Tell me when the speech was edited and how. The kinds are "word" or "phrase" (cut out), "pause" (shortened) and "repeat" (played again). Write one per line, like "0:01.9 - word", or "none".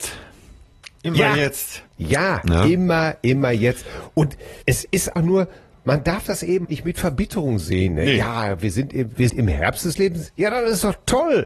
0:01.9 - pause
0:04.6 - pause
0:05.2 - word
0:06.6 - word
0:09.3 - word